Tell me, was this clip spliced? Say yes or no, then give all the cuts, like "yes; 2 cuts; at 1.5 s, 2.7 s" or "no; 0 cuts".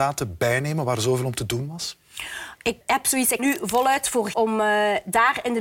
yes; 3 cuts; at 2.8 s, 3.4 s, 4.3 s